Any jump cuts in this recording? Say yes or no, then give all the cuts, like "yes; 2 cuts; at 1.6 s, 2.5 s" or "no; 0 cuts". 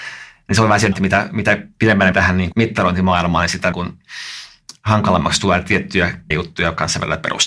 yes; 5 cuts; at 0.9 s, 2.1 s, 2.5 s, 3.7 s, 6.3 s